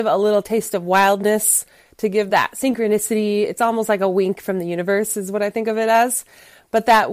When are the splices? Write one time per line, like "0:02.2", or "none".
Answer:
none